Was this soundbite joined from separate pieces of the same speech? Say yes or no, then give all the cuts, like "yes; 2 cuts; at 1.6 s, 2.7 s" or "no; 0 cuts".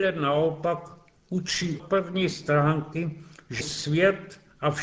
yes; 2 cuts; at 1.8 s, 3.6 s